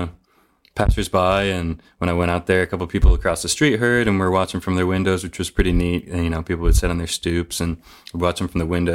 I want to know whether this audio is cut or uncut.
uncut